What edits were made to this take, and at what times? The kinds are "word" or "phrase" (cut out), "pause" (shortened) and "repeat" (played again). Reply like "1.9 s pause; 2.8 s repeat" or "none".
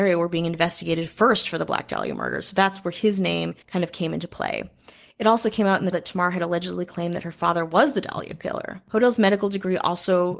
3.6 s pause; 5.9 s word

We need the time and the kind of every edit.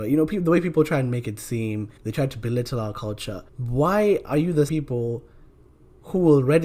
2.0 s pause; 3.5 s pause; 4.7 s word

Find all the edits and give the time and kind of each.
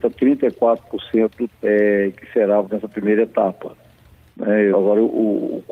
1.5 s word; 2.6 s word; 4.7 s word

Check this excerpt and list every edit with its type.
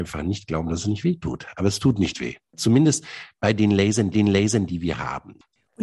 4.1 s repeat

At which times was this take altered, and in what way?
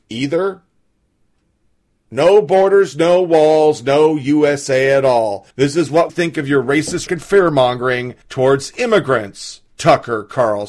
5.5 s pause; 6.1 s word; 7.1 s word; 8.2 s pause; 9.7 s pause

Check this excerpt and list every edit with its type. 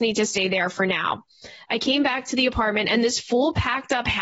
none

